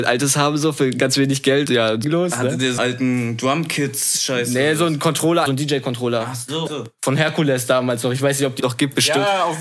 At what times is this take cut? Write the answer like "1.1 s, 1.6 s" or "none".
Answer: 1.7 s, 2.0 s, 2.8 s, 5.5 s, 6.7 s, 8.6 s